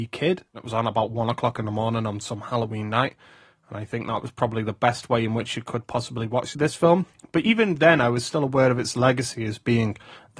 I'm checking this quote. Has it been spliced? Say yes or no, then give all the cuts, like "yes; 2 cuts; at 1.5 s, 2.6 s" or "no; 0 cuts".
no; 0 cuts